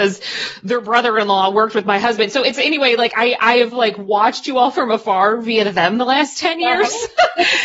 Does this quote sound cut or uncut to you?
uncut